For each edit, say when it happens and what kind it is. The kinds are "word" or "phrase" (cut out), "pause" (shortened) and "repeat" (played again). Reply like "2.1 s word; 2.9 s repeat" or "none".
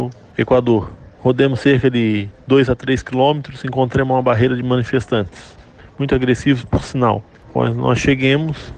none